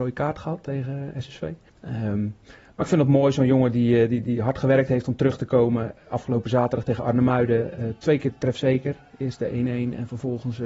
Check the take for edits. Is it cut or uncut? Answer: cut